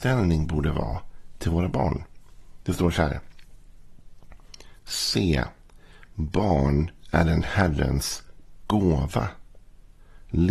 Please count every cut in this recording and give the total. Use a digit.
0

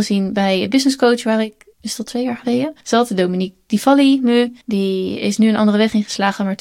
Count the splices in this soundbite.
3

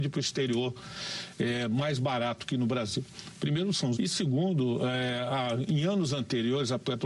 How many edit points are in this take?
1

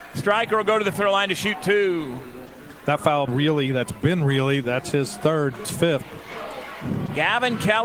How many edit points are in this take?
3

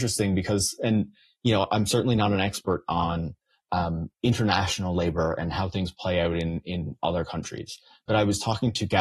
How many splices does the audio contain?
0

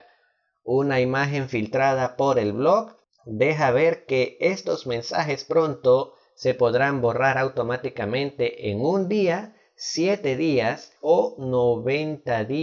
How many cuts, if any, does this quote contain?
0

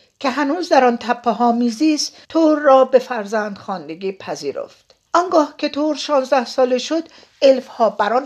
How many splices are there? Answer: 2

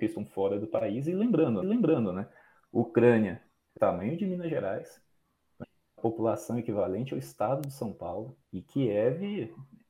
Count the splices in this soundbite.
5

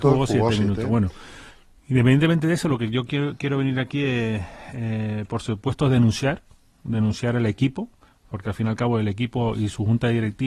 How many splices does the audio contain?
0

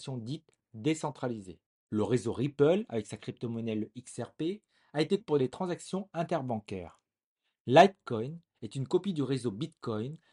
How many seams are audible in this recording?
1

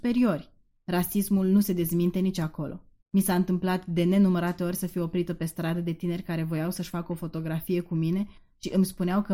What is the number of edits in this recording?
1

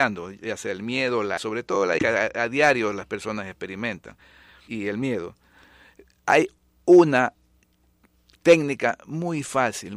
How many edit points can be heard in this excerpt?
3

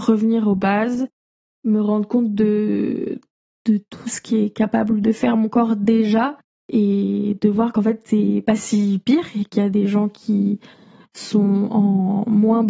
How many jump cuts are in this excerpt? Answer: 0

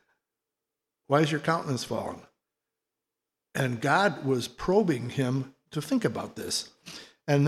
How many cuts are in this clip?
0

